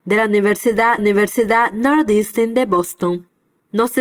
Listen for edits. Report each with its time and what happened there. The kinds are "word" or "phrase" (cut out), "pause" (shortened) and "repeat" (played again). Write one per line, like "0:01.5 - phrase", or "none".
0:01.0 - repeat